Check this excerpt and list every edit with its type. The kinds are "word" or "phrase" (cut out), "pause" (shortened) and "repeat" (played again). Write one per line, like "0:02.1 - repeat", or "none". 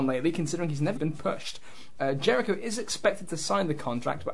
0:01.0 - word